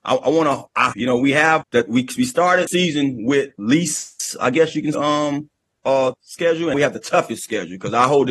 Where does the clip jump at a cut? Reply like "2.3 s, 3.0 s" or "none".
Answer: 0.9 s, 1.6 s, 2.7 s, 3.6 s, 4.9 s, 6.1 s, 6.7 s